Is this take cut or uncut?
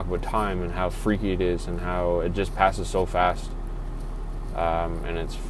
uncut